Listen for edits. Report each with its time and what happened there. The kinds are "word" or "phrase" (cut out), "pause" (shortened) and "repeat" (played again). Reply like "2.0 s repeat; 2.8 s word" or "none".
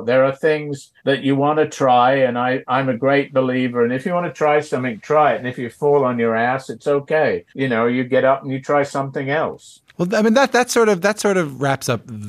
1.0 s pause; 7.5 s pause; 9.9 s pause